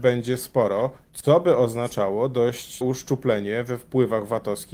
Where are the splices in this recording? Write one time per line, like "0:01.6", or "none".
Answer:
0:02.8